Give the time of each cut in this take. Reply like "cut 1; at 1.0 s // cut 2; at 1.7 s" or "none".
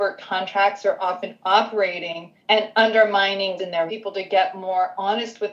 cut 1; at 2.4 s // cut 2; at 3.6 s // cut 3; at 3.9 s